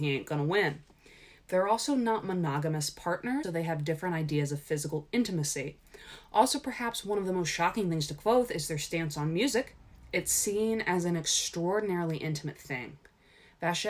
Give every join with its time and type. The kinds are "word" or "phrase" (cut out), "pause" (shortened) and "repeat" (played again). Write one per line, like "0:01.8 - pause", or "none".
0:03.4 - word